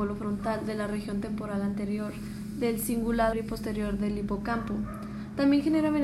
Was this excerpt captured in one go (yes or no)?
no